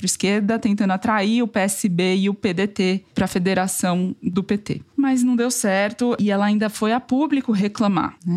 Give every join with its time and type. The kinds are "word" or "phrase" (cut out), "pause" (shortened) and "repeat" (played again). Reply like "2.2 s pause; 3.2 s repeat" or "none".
none

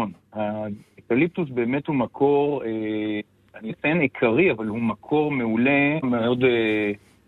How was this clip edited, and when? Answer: 3.7 s word; 6.0 s word

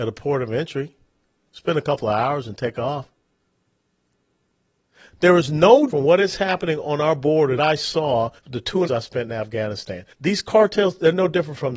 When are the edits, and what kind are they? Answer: 5.9 s word; 7.6 s phrase; 8.4 s pause; 8.9 s phrase; 10.1 s pause

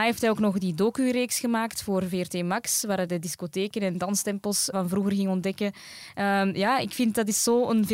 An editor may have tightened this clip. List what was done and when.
4.7 s word

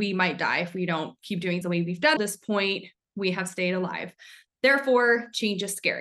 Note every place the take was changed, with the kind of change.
1.6 s word; 2.2 s phrase

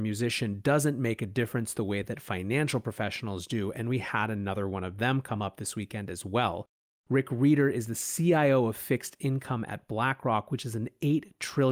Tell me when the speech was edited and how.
none

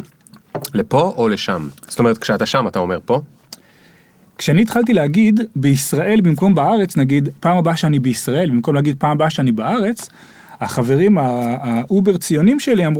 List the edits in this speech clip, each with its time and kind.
none

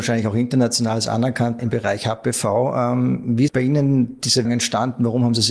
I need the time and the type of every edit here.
1.6 s word; 3.5 s word; 4.4 s word

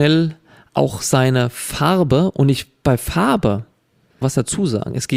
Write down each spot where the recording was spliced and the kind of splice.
4.2 s phrase

